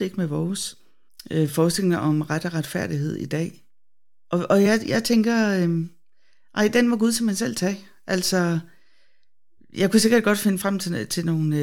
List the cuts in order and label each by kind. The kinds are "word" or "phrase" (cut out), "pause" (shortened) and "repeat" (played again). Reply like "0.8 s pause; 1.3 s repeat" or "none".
none